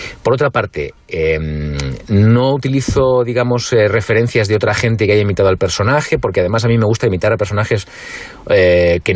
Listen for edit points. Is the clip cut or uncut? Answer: uncut